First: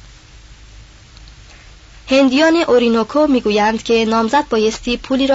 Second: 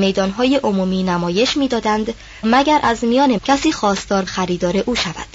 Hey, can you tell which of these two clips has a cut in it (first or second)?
second